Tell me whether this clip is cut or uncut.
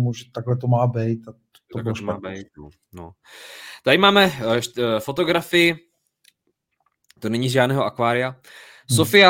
uncut